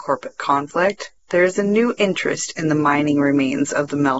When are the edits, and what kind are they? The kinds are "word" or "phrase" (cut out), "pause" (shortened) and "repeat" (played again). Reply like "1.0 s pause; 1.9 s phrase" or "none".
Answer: 1.2 s pause